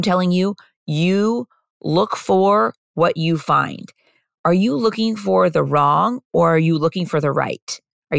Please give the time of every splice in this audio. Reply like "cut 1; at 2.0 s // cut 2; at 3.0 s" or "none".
none